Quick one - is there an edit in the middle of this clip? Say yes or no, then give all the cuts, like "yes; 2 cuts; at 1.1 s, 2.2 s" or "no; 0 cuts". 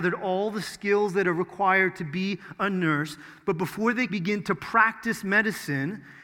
yes; 1 cut; at 4.1 s